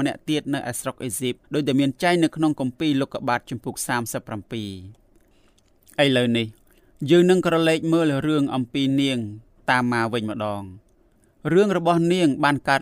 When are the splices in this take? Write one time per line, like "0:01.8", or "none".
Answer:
0:01.4